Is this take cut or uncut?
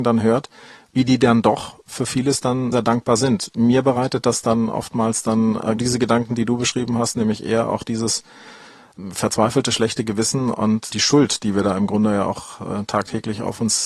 cut